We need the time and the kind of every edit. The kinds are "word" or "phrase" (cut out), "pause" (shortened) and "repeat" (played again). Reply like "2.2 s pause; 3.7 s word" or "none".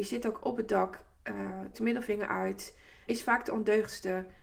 1.7 s word; 3.1 s word